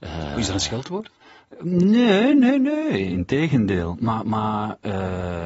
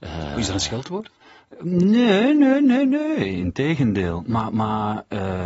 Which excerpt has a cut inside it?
first; 1 cut; at 2.3 s

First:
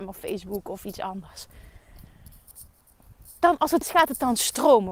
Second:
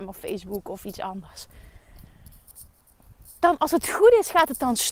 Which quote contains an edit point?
first; 1 cut; at 3.8 s

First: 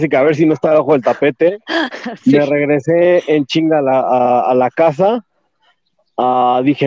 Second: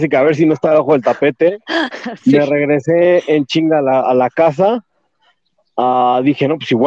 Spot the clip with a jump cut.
second; 1 cut; at 4.0 s

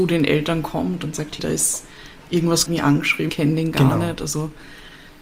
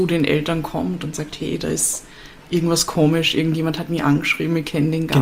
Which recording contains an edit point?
first; 3 cuts; at 1.4 s, 2.7 s, 3.3 s

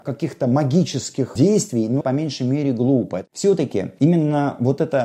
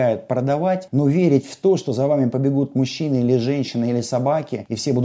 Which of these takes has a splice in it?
first; 1 cut; at 2.0 s

